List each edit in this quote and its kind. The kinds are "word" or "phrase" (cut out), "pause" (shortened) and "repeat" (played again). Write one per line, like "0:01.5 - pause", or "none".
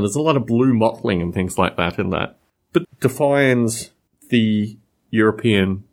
0:02.8 - word

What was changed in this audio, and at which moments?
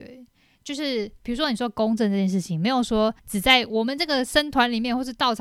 0:03.2 - pause

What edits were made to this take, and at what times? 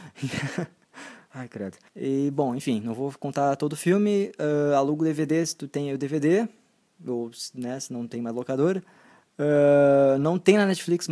0:01.9 - pause

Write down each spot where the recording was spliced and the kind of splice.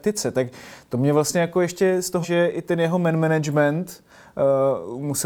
0:02.2 - word

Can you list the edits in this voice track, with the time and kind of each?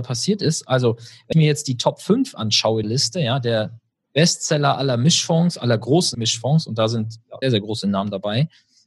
0:01.3 - word
0:02.8 - word
0:06.1 - word
0:07.4 - word

